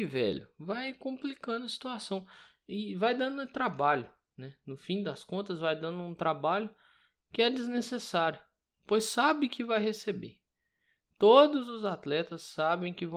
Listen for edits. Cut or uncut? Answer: uncut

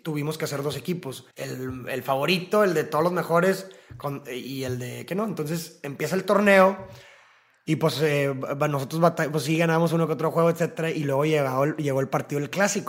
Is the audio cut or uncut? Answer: cut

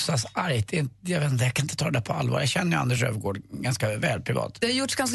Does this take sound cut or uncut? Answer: uncut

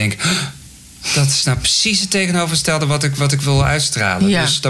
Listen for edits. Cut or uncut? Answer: uncut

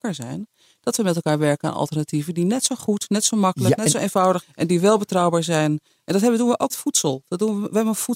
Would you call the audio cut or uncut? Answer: cut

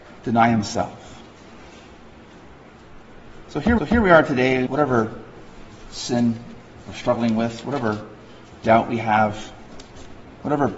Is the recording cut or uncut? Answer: cut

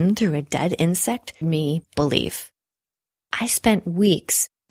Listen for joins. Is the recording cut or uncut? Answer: cut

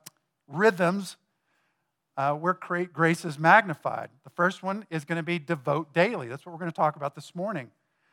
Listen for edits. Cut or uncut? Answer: uncut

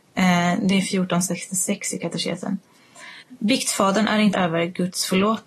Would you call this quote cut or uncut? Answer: cut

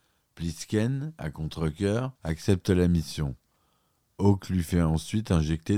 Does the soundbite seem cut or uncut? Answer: cut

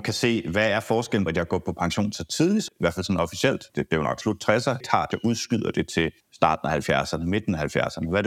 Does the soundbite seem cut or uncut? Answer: cut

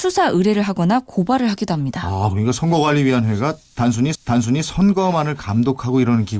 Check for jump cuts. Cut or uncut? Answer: cut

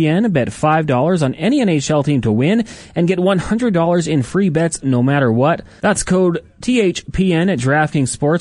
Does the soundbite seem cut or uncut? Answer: uncut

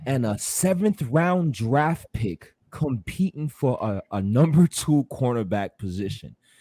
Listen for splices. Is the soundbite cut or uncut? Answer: cut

